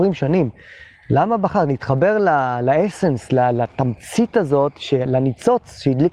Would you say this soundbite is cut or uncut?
uncut